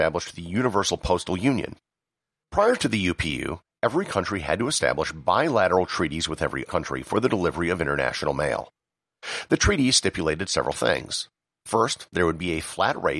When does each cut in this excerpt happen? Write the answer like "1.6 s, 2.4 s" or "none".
6.7 s

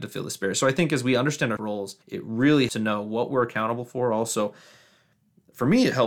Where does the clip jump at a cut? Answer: 1.6 s, 2.0 s, 2.7 s

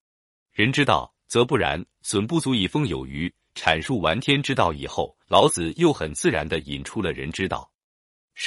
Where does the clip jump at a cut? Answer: 5.2 s

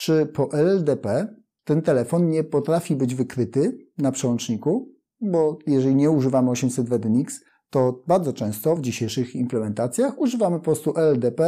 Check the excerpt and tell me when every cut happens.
none

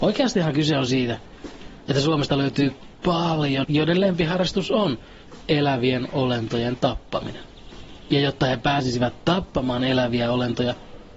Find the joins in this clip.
3.6 s

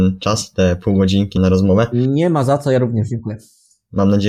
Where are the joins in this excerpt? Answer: 1.4 s

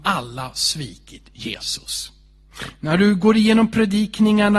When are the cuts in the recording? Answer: none

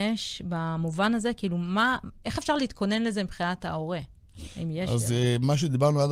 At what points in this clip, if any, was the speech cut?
none

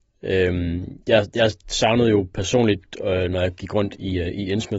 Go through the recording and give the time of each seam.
none

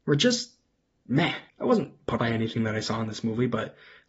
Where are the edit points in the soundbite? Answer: 1.5 s, 2.2 s

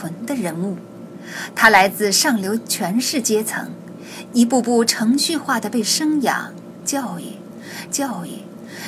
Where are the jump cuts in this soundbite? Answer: 7.9 s

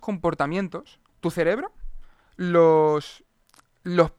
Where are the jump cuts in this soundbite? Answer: 1.1 s

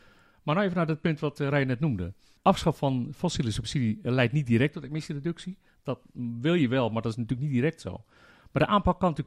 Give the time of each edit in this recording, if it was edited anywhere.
none

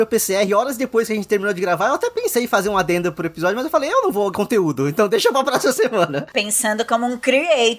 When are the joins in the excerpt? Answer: 4.3 s

